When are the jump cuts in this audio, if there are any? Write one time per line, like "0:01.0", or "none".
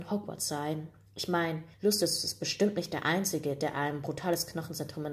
0:01.7